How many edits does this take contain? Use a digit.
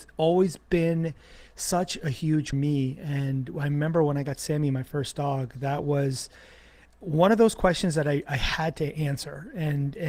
2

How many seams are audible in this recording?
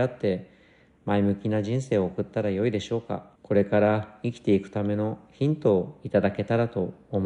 1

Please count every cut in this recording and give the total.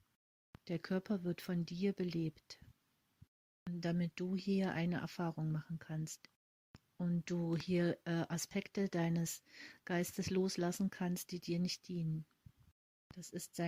0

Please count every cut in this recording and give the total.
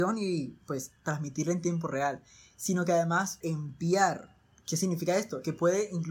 1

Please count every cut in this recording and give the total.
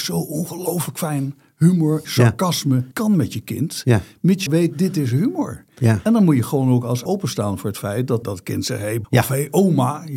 6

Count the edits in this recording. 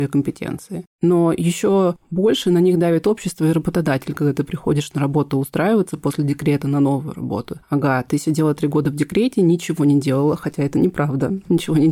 1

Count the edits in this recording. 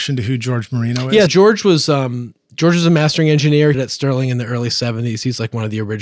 2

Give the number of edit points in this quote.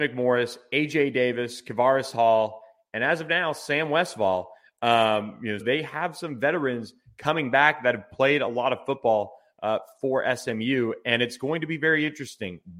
1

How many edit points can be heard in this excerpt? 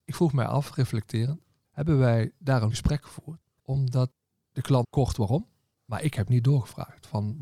2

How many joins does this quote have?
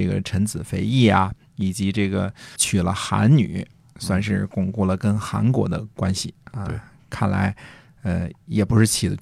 1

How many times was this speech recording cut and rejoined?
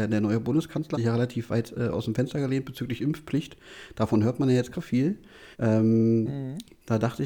3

